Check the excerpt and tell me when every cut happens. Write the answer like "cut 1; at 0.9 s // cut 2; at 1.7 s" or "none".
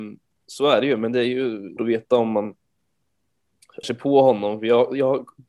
cut 1; at 1.8 s // cut 2; at 3.8 s